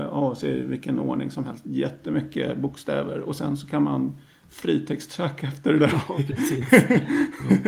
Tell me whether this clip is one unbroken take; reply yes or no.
yes